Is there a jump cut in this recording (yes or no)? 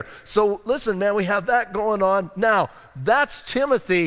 no